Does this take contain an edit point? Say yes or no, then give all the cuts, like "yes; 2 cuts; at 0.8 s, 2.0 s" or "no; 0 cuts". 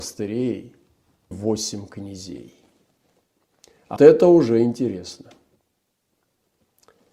yes; 2 cuts; at 1.3 s, 4.0 s